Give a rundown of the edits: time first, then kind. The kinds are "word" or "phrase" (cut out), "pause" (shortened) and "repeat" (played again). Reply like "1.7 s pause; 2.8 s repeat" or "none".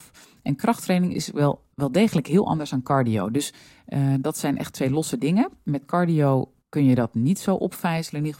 none